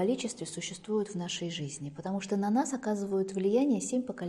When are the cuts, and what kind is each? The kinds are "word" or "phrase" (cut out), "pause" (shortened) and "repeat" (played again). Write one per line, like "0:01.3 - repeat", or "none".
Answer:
none